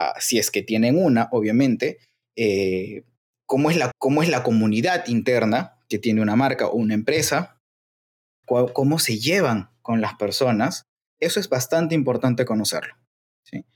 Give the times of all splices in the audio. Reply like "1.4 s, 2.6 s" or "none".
3.9 s, 8.4 s